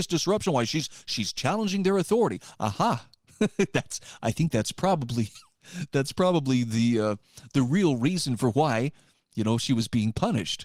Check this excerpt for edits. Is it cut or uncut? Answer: uncut